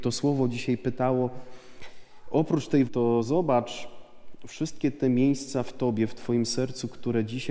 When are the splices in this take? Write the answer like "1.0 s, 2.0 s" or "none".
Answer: 2.9 s